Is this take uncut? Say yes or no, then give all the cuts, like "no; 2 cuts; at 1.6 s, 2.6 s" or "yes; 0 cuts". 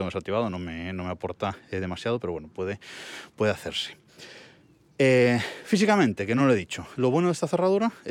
yes; 0 cuts